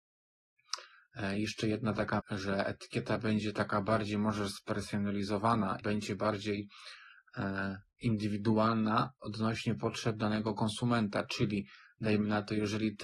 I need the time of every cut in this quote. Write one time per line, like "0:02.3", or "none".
0:02.2
0:05.8
0:09.2